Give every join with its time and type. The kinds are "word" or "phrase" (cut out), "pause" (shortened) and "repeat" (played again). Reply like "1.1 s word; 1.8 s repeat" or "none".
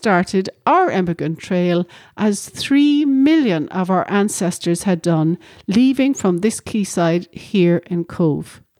none

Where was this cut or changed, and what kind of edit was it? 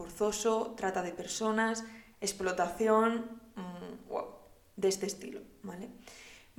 none

